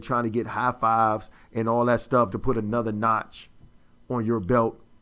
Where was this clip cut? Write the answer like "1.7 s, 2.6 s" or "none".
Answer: 2.3 s